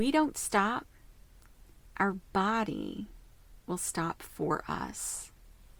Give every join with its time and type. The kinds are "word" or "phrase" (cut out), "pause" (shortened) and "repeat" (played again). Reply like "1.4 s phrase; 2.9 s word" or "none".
none

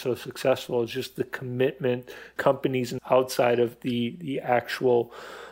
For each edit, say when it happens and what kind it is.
2.4 s word; 3.0 s word

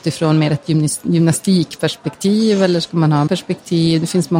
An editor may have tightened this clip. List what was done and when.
3.3 s word

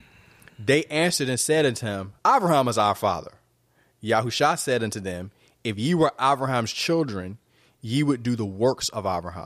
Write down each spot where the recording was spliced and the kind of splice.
2.2 s pause

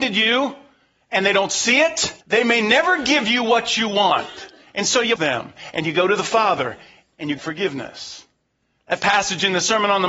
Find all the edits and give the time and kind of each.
2.2 s pause; 5.2 s word; 7.4 s word; 9.0 s word

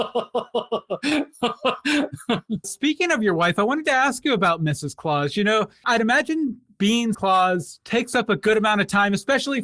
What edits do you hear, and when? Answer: 2.6 s word; 7.1 s word

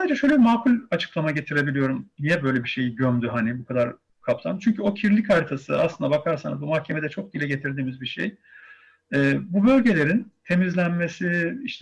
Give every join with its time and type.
none

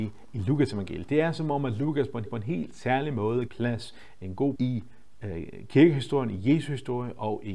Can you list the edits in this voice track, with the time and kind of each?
2.3 s repeat; 3.5 s phrase; 4.6 s word

